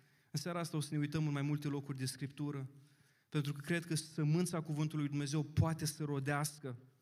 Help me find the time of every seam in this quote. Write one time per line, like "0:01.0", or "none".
none